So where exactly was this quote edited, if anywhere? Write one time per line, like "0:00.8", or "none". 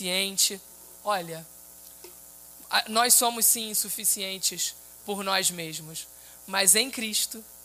none